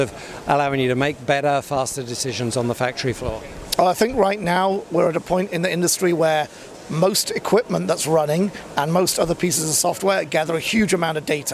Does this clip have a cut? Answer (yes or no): no